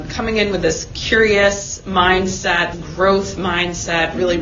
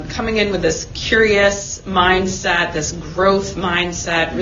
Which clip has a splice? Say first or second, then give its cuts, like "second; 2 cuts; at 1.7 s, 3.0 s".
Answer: first; 1 cut; at 2.7 s